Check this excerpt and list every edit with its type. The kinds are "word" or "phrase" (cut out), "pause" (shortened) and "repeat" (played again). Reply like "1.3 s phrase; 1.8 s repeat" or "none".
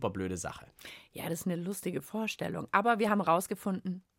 none